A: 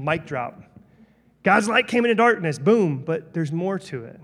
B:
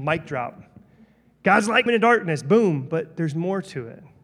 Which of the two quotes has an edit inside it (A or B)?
B